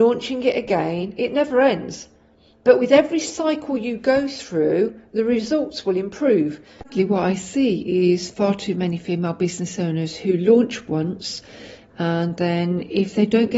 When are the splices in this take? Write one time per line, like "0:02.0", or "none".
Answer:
none